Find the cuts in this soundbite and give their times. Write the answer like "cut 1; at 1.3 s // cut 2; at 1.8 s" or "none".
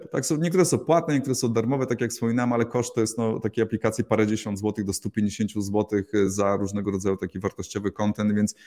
none